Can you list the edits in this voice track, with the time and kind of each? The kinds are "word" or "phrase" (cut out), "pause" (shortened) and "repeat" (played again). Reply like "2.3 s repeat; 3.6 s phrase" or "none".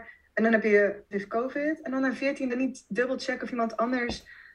1.1 s phrase; 2.5 s phrase